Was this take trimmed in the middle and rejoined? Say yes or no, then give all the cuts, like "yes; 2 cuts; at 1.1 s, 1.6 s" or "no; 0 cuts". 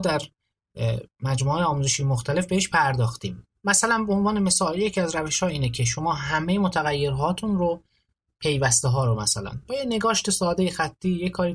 no; 0 cuts